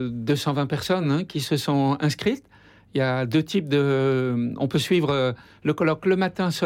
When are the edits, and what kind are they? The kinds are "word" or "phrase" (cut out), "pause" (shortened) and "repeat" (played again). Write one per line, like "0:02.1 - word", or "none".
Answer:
none